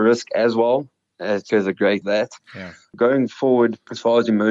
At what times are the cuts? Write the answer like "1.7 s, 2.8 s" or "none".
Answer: 1.5 s, 2.0 s